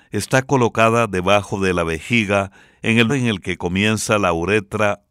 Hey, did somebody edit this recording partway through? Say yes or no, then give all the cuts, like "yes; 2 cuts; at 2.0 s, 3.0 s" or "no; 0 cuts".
yes; 1 cut; at 3.1 s